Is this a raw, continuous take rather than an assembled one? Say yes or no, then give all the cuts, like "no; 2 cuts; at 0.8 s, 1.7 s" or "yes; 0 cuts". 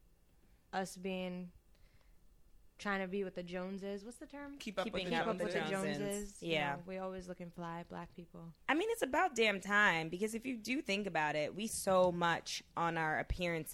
no; 3 cuts; at 2.8 s, 8.6 s, 11.7 s